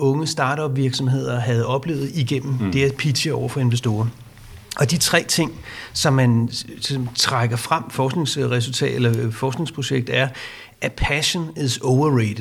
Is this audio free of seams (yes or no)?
no